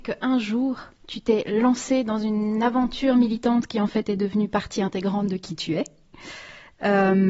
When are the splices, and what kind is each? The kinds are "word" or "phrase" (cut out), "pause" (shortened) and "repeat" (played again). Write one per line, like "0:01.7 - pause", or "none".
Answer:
0:01.0 - pause